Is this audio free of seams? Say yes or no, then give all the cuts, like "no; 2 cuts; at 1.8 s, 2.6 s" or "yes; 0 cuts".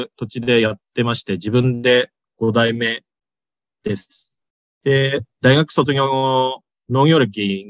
yes; 0 cuts